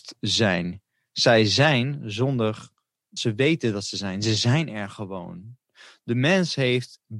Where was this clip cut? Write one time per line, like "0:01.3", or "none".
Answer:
0:03.2